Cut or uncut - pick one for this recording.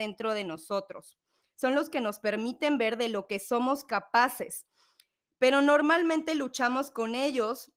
uncut